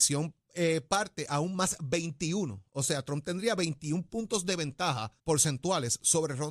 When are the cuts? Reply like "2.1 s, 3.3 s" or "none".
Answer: 5.2 s